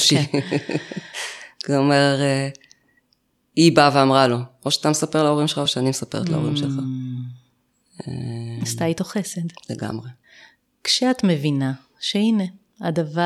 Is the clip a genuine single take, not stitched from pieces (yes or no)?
yes